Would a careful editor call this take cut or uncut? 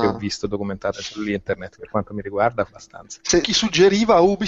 cut